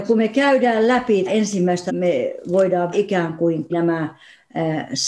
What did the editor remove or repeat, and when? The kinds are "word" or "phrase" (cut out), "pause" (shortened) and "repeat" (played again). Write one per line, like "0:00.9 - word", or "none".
0:01.3 - word
0:01.9 - phrase
0:02.9 - word
0:03.7 - word